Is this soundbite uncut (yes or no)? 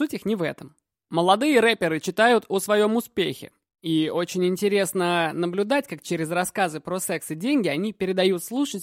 yes